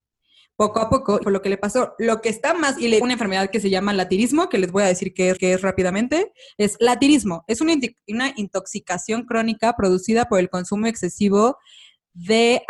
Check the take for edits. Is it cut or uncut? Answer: cut